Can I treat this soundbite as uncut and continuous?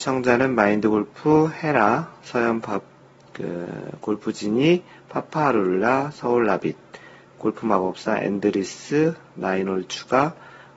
yes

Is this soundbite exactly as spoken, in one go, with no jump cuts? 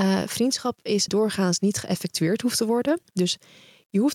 no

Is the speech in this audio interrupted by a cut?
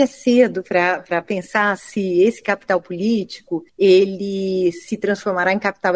yes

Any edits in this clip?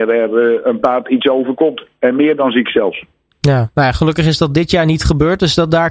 no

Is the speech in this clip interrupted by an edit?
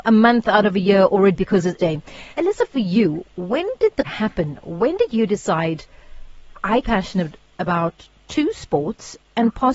yes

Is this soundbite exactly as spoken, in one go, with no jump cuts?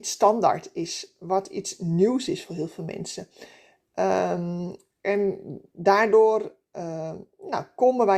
yes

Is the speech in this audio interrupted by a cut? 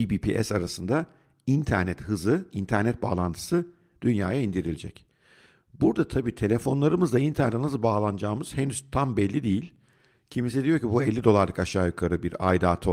no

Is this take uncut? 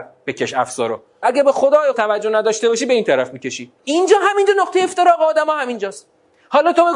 no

